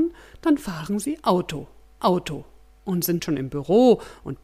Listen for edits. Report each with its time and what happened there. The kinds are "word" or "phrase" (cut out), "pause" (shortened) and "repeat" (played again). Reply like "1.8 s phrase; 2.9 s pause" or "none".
2.0 s repeat; 3.2 s phrase